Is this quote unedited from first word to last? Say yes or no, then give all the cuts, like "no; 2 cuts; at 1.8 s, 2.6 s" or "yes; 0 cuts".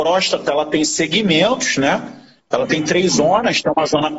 yes; 0 cuts